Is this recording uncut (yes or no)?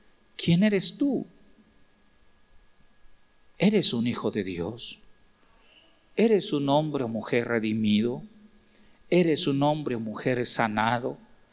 yes